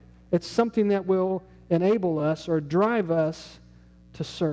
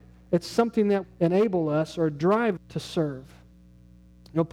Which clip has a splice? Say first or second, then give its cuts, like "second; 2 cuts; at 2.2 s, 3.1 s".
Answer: second; 2 cuts; at 1.0 s, 2.6 s